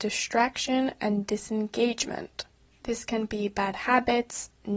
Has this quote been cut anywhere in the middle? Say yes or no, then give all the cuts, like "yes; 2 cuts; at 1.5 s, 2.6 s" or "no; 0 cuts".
no; 0 cuts